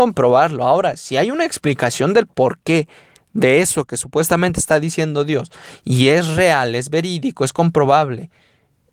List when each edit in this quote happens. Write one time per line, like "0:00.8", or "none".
none